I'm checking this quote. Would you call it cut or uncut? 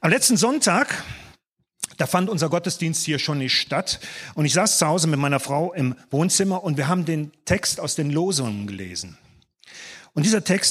uncut